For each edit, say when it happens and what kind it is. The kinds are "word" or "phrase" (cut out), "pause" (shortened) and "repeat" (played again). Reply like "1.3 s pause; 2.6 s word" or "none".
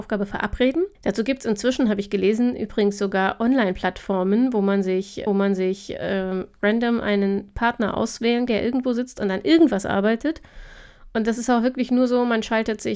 0.9 s pause; 5.3 s repeat; 8.5 s word